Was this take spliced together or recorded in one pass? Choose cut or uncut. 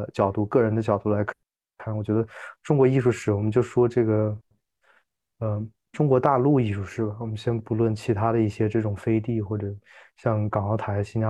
uncut